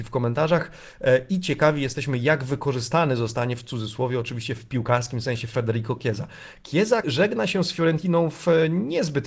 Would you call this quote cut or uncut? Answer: cut